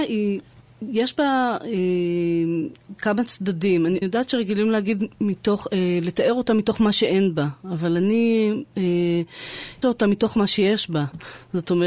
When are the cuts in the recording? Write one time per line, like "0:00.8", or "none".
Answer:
0:04.0
0:09.8

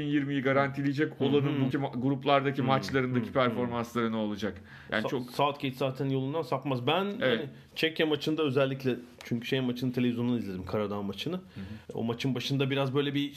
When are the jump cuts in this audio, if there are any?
0:01.7
0:11.8

